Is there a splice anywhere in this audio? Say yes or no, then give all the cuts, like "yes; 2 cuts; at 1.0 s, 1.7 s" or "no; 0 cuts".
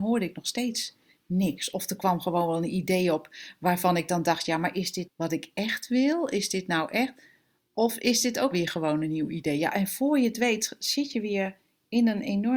yes; 2 cuts; at 5.0 s, 8.5 s